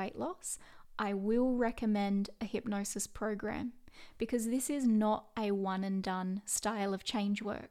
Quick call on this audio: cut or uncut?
uncut